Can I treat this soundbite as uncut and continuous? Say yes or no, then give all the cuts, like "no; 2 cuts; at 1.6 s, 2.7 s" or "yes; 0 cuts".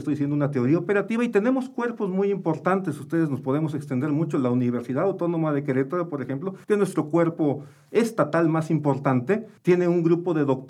no; 2 cuts; at 6.6 s, 9.6 s